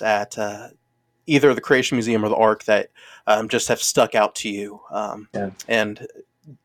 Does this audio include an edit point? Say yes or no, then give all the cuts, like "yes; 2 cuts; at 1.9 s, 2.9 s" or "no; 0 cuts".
no; 0 cuts